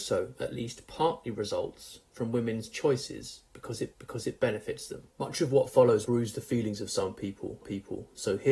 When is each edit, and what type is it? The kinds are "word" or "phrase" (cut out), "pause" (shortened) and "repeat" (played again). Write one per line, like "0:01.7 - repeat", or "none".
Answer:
0:03.9 - repeat
0:05.1 - pause
0:06.0 - word
0:07.6 - repeat